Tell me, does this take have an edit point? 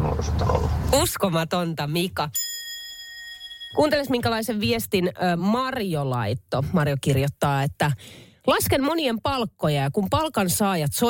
no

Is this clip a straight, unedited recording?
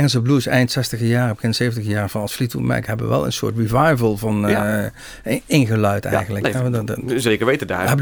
yes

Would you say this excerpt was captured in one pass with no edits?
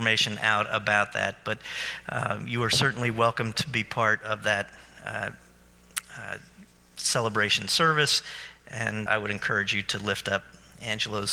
no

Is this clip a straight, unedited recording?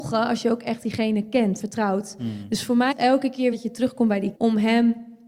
no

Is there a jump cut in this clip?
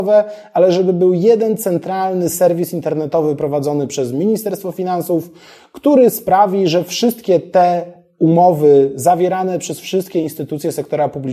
no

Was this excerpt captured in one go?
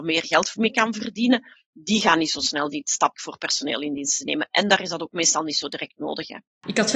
no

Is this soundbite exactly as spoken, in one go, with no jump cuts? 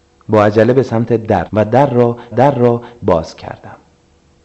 no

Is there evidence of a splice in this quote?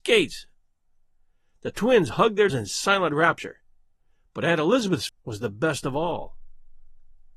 yes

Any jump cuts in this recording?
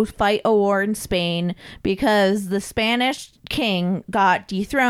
yes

